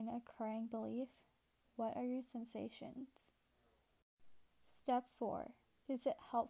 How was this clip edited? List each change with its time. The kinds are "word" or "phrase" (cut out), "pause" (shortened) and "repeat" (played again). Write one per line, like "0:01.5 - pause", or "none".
none